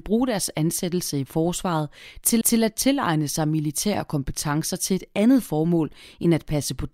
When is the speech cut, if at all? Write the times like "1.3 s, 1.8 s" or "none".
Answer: 2.4 s